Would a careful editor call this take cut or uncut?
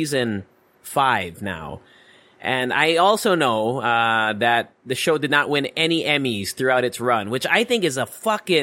uncut